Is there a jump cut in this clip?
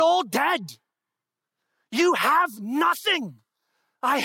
no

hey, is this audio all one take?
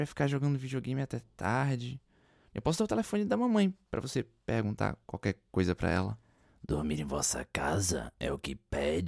yes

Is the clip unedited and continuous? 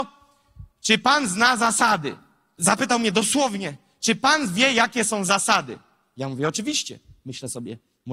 yes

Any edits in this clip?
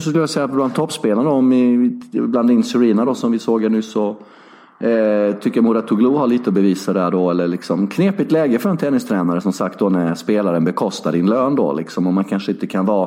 no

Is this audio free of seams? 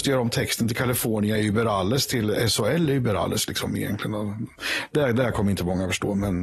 yes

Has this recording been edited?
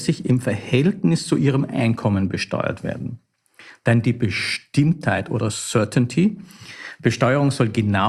no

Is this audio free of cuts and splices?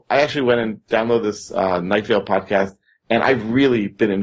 yes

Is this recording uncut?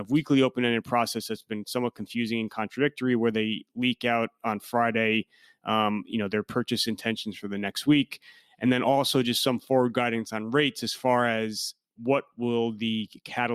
yes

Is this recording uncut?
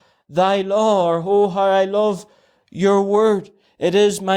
yes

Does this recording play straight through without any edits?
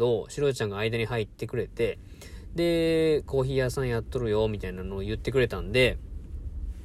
yes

